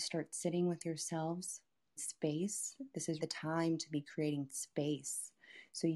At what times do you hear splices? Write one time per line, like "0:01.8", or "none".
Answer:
0:02.0
0:03.2